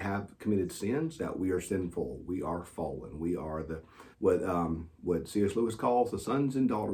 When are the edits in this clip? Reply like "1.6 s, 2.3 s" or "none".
1.2 s, 4.1 s, 4.9 s